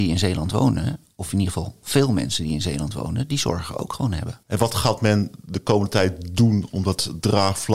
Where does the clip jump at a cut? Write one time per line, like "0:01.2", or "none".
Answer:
0:04.4

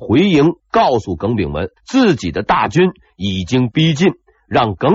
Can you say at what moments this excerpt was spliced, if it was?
0:01.8

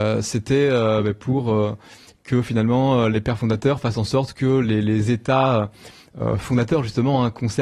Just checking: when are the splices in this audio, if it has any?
none

